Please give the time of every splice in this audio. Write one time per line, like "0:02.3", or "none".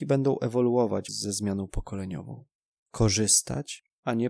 0:01.1

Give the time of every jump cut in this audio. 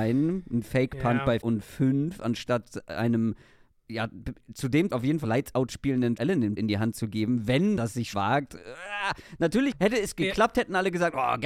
0:01.4
0:04.9
0:05.2
0:06.2
0:06.6
0:07.8
0:08.1
0:09.7

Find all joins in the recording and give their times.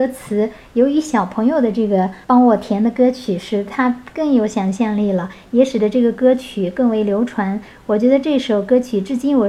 0:02.2

